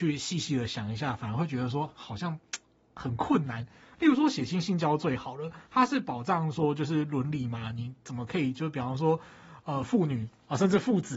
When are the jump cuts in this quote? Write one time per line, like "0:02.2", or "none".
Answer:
none